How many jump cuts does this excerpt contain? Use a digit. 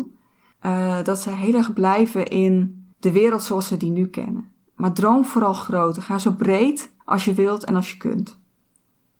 1